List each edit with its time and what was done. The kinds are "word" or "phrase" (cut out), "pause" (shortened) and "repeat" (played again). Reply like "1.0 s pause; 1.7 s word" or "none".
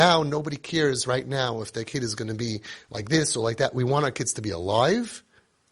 none